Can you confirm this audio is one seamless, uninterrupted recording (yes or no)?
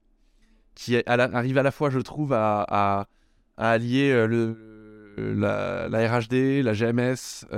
yes